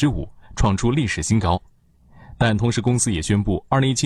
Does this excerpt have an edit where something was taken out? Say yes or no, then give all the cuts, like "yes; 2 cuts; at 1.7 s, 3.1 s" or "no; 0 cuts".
no; 0 cuts